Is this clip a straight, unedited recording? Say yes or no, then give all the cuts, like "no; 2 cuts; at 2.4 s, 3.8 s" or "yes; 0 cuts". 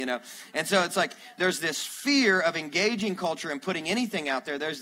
yes; 0 cuts